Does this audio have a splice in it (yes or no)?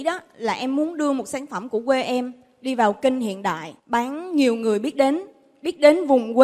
yes